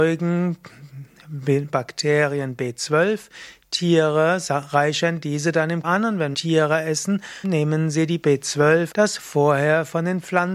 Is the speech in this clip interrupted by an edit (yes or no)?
yes